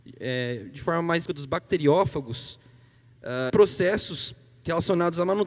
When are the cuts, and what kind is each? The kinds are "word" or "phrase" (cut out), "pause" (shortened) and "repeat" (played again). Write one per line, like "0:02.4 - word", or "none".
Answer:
0:01.3 - word
0:03.5 - word